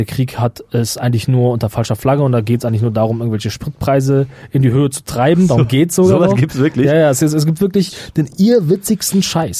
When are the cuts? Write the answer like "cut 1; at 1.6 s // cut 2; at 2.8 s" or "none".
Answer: none